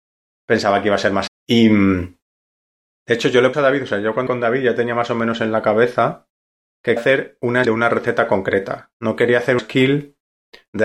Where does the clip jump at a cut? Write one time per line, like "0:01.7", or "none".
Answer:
0:01.3
0:03.5
0:04.3
0:07.0
0:07.6
0:09.6